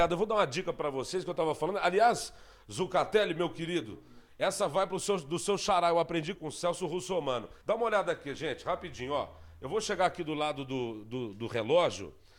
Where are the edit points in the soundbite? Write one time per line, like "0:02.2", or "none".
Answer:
0:06.4
0:07.6

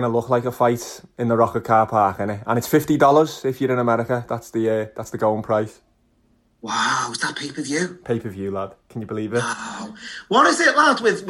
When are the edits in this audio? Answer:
none

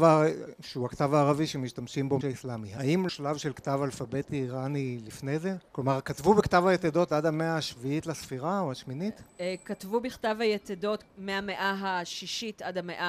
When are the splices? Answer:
0:02.2
0:03.1
0:05.7
0:11.1

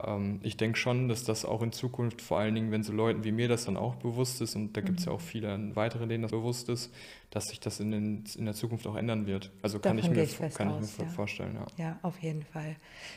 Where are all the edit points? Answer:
0:06.3

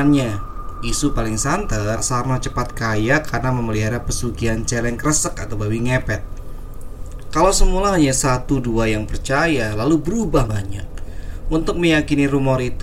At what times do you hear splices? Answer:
0:02.0
0:10.5

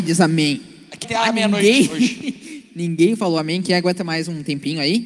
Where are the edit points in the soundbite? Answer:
0:01.0

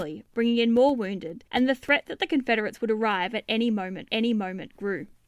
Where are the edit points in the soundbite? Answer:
0:01.5
0:04.1

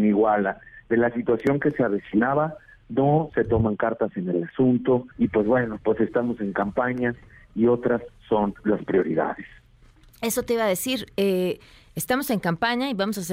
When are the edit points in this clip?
0:05.1

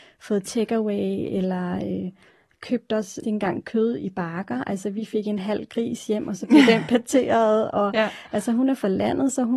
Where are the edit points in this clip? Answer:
0:03.2
0:03.6

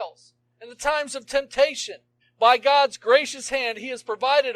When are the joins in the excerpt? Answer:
0:02.2

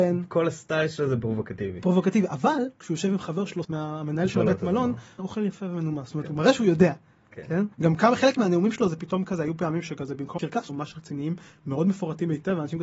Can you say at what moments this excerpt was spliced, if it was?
0:03.6
0:05.2
0:07.7
0:10.4
0:10.7

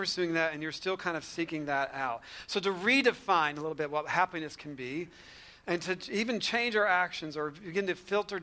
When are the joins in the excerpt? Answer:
none

